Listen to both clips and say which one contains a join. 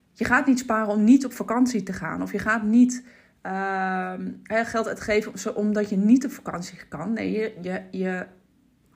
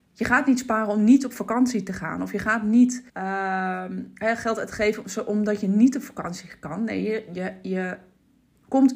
second; 1 cut; at 3.1 s

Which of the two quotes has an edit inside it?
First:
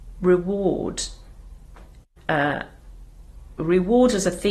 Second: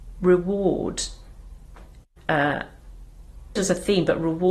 second; 1 cut; at 3.6 s

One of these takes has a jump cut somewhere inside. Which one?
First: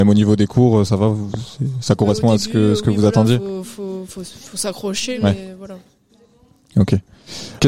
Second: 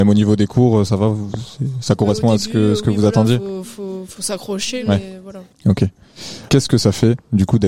second; 2 cuts; at 4.2 s, 5.5 s

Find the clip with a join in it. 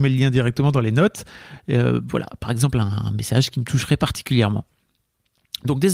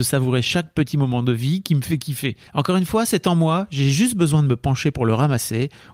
second; 1 cut; at 2.5 s

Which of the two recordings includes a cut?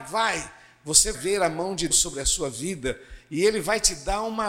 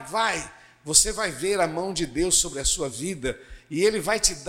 first; 2 cuts; at 1.1 s, 1.9 s

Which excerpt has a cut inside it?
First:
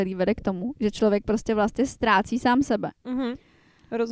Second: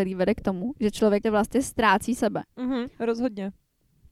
second; 3 cuts; at 1.2 s, 2.2 s, 2.9 s

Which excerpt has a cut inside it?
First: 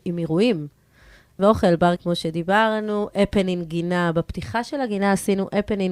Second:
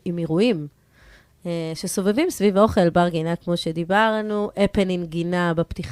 first; 2 cuts; at 1.4 s, 2.0 s

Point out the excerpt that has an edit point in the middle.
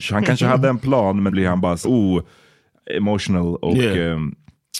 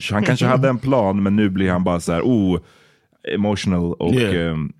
first; 2 cuts; at 1.3 s, 1.8 s

